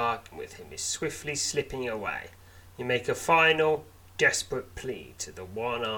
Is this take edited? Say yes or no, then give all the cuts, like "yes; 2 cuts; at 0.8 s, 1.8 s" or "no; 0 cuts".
no; 0 cuts